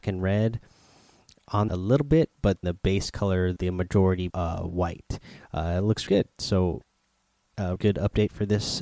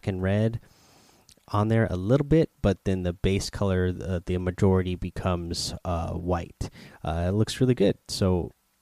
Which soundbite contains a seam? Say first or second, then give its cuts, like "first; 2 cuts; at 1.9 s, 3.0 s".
first; 6 cuts; at 1.7 s, 2.6 s, 3.6 s, 4.3 s, 6.1 s, 7.8 s